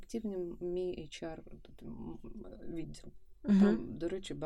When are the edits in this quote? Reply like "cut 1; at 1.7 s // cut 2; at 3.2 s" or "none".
none